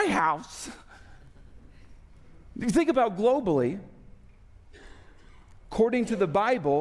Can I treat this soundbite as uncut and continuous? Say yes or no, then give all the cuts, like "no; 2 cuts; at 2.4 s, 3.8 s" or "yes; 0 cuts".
yes; 0 cuts